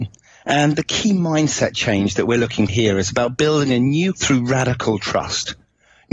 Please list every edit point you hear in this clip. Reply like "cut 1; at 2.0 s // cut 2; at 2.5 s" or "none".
cut 1; at 2.7 s // cut 2; at 4.1 s

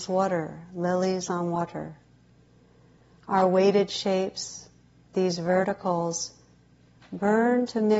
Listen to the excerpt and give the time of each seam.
none

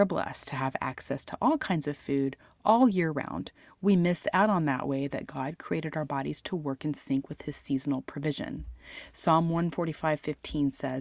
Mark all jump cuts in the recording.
none

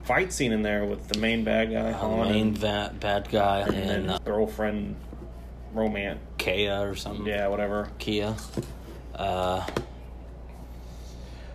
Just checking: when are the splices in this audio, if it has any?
cut 1; at 3.7 s // cut 2; at 4.2 s

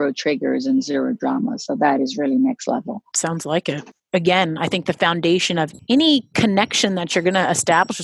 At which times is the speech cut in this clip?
none

